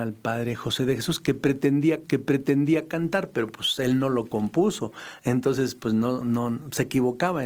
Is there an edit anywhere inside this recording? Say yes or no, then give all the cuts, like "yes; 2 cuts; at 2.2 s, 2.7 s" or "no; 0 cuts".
yes; 2 cuts; at 2.0 s, 6.2 s